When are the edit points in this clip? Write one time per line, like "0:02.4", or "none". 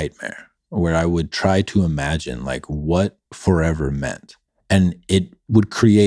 0:03.3
0:04.5